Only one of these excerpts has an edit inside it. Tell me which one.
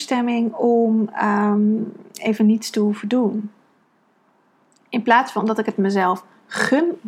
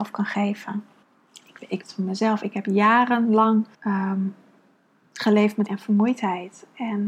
second; 4 cuts; at 1.0 s, 1.8 s, 3.7 s, 5.7 s

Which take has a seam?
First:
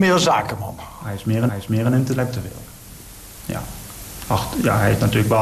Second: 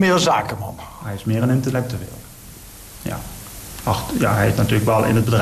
first; 1 cut; at 1.5 s

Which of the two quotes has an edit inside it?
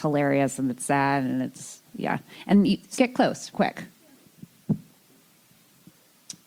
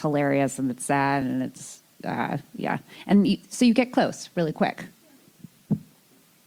first; 3 cuts; at 1.9 s, 3.0 s, 3.5 s

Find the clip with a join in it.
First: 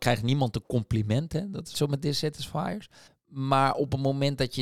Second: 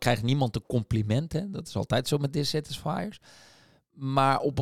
first; 2 cuts; at 1.7 s, 3.1 s

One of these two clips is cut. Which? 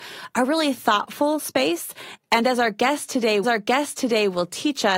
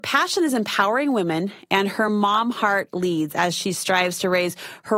first; 1 cut; at 3.4 s

